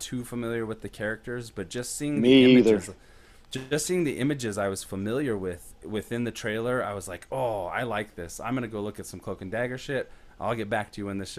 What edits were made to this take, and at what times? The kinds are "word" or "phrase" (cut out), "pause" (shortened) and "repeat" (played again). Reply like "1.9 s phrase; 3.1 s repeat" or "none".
none

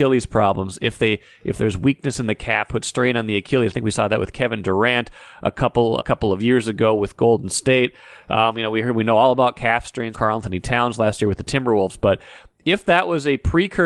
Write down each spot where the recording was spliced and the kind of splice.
2.7 s word; 6.0 s word; 10.1 s word

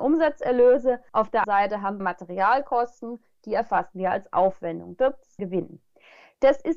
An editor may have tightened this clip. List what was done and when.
1.1 s pause; 1.4 s word; 2.0 s word; 5.4 s phrase

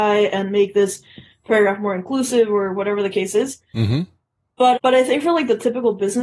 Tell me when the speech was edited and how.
4.7 s word

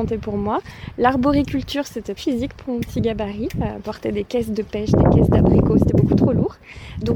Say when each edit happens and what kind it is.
2.2 s word

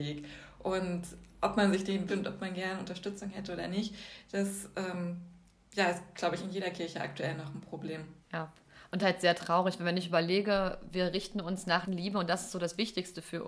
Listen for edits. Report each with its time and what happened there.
2.1 s phrase; 8.2 s pause; 9.0 s phrase; 11.9 s phrase

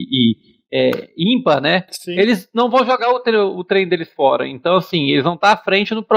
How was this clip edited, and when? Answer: 1.9 s pause

